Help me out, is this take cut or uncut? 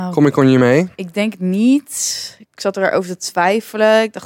cut